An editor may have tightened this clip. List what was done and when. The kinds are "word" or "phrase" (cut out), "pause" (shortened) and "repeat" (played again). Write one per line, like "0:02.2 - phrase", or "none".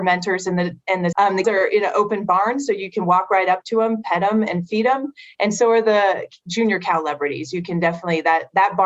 0:01.1 - word
0:01.4 - word

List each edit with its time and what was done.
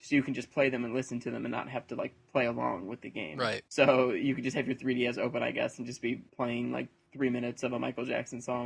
0:03.7 - pause
0:06.3 - pause

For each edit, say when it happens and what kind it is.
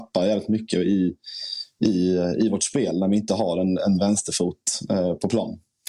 none

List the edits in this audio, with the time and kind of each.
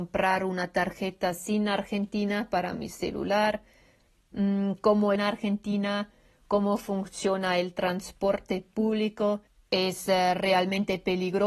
0:05.2 - phrase
0:09.5 - pause

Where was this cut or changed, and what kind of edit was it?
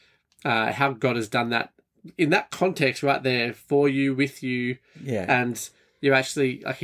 none

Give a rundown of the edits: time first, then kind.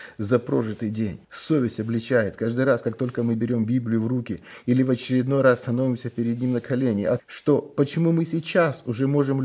0:01.2 - pause
0:07.2 - word

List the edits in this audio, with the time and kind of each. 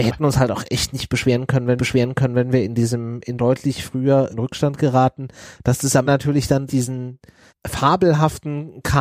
0:01.8 - repeat
0:03.4 - phrase
0:04.3 - word
0:06.1 - word
0:06.7 - word
0:07.5 - pause

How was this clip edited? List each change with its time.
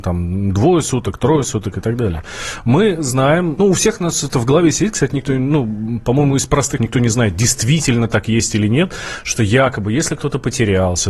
0:03.6 - word
0:06.8 - word

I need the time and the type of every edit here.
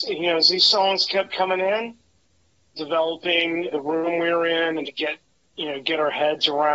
0:02.7 - phrase
0:03.7 - word
0:04.8 - word

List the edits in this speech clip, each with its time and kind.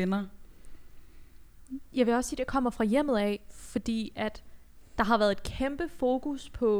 none

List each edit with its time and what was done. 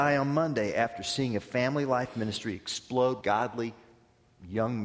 0:03.2 - word

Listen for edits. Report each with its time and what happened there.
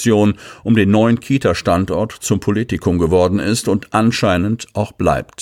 none

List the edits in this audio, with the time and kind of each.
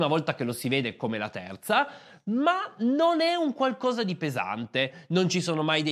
none

